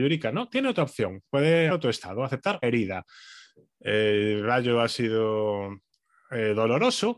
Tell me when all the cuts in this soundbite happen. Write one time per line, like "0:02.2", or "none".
0:01.7
0:02.6